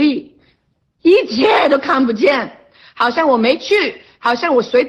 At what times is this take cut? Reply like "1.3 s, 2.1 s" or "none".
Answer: 0.9 s